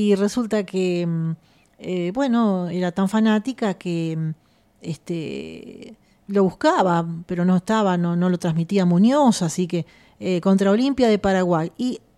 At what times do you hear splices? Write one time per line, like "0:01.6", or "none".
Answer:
none